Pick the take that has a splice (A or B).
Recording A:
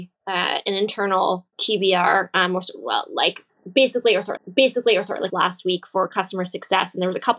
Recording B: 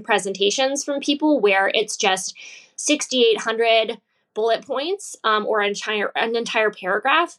A